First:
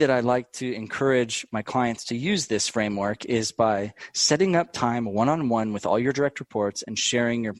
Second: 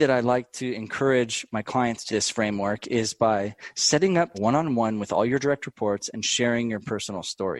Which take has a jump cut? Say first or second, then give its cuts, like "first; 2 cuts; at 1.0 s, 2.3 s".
second; 2 cuts; at 2.1 s, 4.3 s